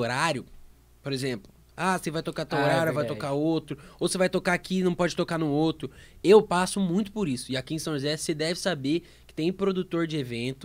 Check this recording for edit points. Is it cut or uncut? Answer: uncut